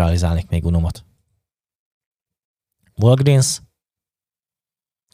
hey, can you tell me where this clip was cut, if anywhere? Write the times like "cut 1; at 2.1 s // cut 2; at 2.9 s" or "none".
none